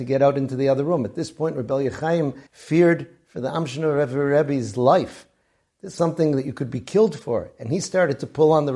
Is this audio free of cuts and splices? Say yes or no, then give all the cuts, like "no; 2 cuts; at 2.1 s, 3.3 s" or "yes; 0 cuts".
no; 2 cuts; at 2.5 s, 6.0 s